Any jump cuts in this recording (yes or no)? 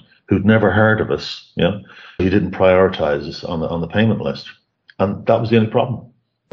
yes